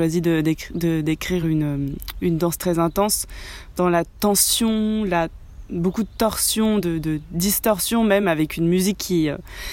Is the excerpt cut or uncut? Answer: uncut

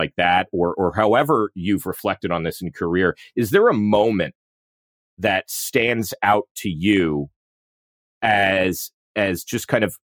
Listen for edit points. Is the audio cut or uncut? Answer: uncut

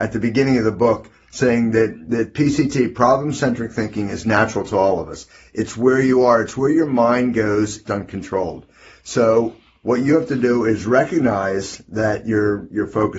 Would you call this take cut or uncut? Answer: cut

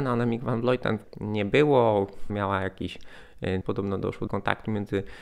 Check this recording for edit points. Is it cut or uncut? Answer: cut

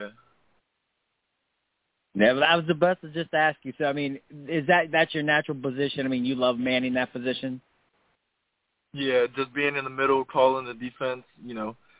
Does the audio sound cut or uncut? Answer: uncut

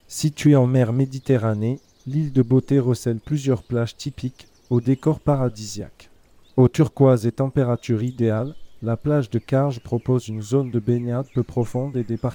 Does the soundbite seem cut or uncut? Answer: uncut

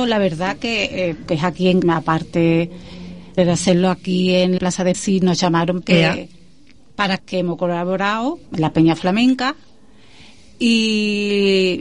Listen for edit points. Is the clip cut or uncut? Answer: cut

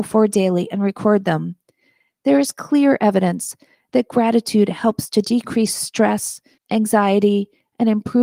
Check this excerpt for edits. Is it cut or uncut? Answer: uncut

